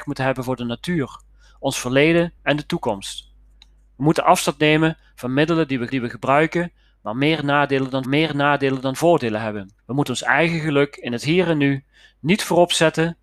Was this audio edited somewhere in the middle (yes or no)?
yes